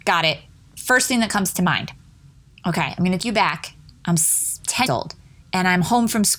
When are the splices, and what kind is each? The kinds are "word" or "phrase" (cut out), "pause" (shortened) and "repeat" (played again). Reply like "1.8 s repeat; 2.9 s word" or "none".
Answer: 3.2 s word; 4.9 s word